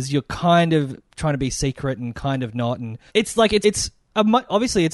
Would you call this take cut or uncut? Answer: cut